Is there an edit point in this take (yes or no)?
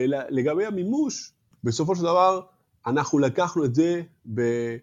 no